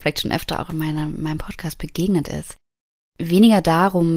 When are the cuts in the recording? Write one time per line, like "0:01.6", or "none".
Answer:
none

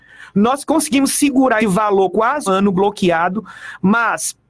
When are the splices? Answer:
0:01.6
0:02.1
0:02.5

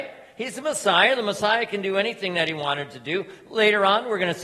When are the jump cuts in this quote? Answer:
none

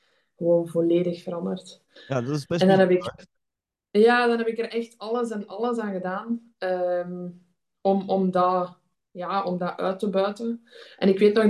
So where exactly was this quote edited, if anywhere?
none

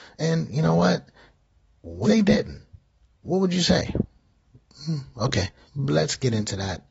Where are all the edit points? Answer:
0:02.0
0:05.7

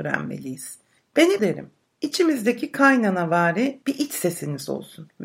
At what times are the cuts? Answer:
0:01.4
0:03.8

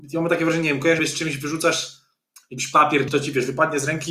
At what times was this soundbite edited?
0:01.0
0:03.1

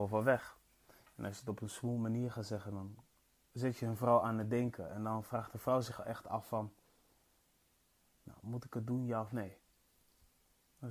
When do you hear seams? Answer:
none

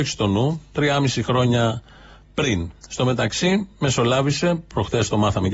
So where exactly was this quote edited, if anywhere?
none

